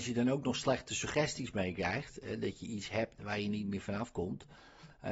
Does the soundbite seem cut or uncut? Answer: uncut